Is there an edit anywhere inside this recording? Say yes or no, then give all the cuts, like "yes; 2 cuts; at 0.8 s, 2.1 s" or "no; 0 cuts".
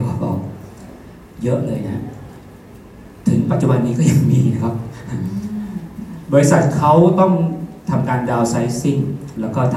no; 0 cuts